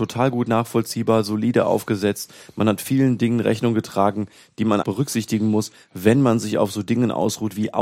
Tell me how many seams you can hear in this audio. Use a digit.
1